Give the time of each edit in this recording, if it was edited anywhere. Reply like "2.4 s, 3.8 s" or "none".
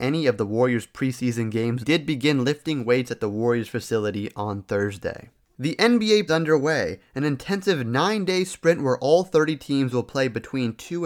1.8 s, 6.3 s